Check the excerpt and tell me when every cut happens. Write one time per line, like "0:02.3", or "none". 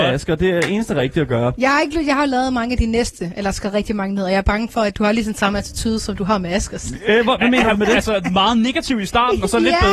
0:04.9